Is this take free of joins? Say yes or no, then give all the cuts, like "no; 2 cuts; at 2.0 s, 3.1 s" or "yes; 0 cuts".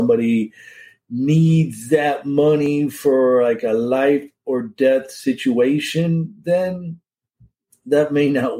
yes; 0 cuts